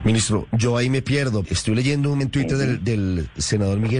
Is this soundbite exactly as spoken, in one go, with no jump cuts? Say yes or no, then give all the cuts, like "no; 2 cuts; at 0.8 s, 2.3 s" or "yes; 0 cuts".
no; 2 cuts; at 1.4 s, 2.2 s